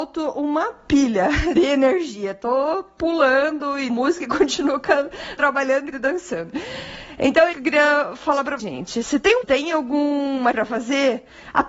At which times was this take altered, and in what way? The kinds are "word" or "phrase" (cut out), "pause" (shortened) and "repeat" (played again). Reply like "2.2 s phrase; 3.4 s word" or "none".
1.6 s word; 3.9 s word; 5.4 s word; 5.9 s word; 7.5 s word; 8.6 s word; 9.4 s word; 10.5 s word